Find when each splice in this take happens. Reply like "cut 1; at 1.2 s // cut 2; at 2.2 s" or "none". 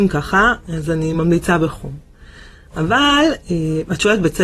none

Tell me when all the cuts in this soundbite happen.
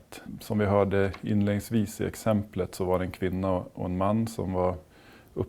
none

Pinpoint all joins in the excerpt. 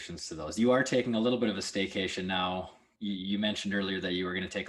none

